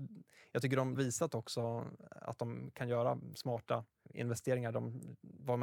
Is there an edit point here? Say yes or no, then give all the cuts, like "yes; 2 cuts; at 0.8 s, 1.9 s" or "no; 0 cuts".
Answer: yes; 2 cuts; at 0.9 s, 4.0 s